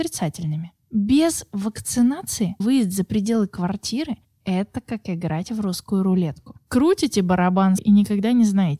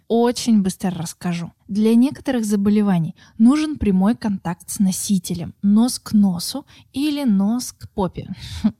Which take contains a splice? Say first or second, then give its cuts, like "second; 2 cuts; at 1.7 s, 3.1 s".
first; 2 cuts; at 2.6 s, 7.8 s